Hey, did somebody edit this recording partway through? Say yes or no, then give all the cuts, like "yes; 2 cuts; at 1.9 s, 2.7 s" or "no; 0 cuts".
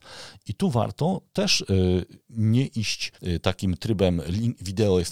yes; 1 cut; at 3.1 s